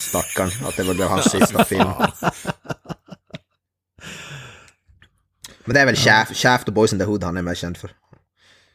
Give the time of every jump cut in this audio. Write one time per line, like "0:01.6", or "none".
none